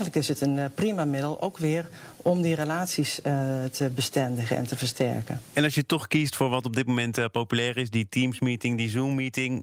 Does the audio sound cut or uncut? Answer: uncut